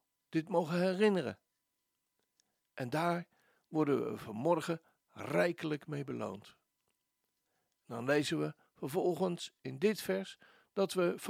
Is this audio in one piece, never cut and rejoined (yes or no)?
yes